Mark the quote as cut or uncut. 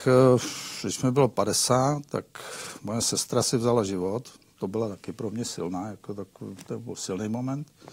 uncut